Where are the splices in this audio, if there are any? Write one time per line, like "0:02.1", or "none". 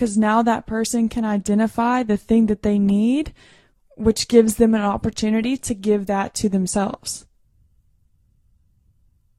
none